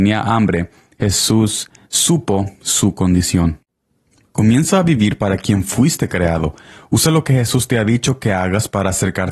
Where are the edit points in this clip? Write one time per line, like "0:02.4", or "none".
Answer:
none